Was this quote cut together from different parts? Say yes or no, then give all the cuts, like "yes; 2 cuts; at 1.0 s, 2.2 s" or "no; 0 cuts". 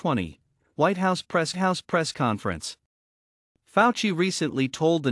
yes; 1 cut; at 1.5 s